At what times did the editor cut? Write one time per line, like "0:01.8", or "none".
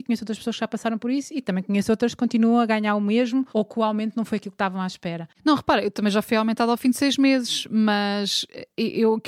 0:03.5